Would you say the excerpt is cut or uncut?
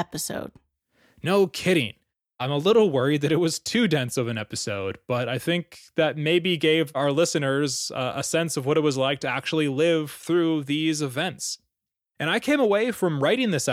uncut